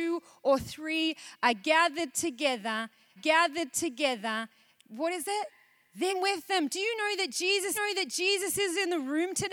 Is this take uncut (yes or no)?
no